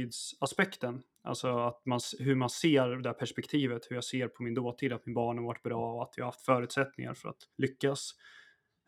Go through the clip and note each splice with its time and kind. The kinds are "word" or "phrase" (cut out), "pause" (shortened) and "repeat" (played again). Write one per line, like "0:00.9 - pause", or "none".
0:07.5 - pause

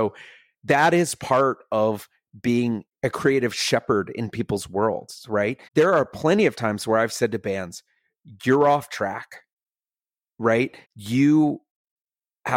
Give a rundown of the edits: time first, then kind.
0:02.9 - word
0:05.7 - pause
0:10.8 - pause

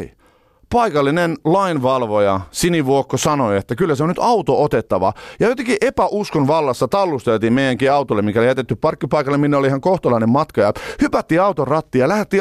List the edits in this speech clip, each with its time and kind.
none

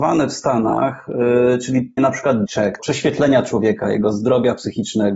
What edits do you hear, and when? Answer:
0:02.0 - word
0:02.5 - word
0:02.8 - word

